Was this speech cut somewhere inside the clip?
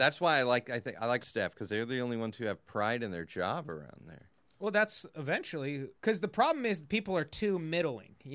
yes; 3 cuts; at 1.2 s, 4.5 s, 6.0 s

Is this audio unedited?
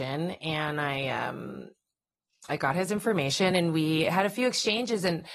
yes; 0 cuts

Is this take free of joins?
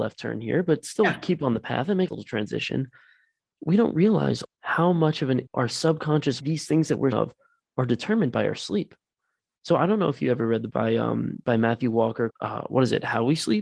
no; 7 cuts; at 2.1 s, 4.4 s, 5.5 s, 6.4 s, 7.1 s, 10.7 s, 12.3 s

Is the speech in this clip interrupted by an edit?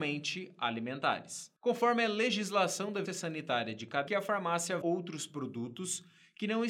yes; 4 cuts; at 1.6 s, 3.1 s, 4.1 s, 4.8 s

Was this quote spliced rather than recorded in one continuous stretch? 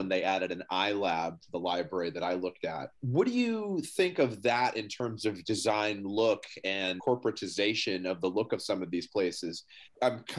yes; 1 cut; at 3.0 s

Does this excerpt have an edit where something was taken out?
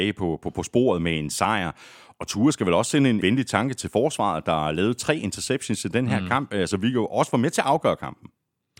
yes; 1 cut; at 3.2 s

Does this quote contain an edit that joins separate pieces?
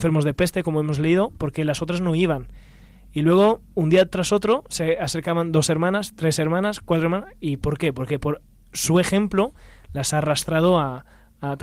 no; 0 cuts

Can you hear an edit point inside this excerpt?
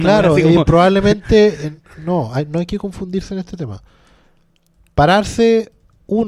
no; 0 cuts

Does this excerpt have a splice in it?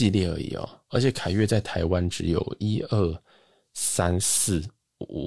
no; 0 cuts

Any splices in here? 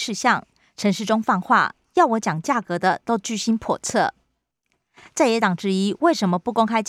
no; 0 cuts

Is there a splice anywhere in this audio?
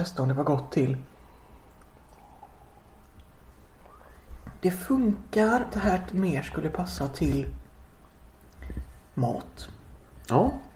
yes; 2 cuts; at 5.7 s, 6.1 s

